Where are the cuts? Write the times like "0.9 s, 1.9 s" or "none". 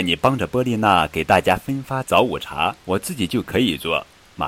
2.8 s